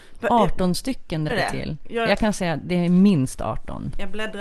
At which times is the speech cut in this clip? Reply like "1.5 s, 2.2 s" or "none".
1.3 s